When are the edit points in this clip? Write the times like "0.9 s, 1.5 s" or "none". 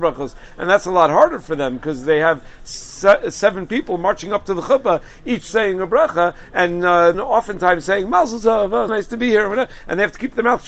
7.1 s, 8.9 s